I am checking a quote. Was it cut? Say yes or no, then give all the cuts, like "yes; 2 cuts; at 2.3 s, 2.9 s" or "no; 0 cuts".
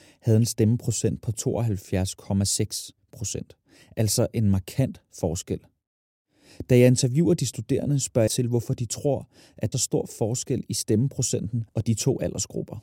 yes; 3 cuts; at 8.3 s, 9.7 s, 11.7 s